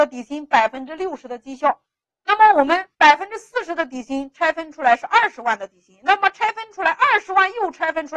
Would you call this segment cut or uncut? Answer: cut